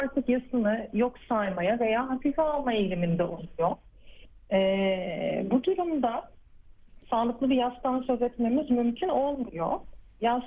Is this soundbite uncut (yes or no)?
yes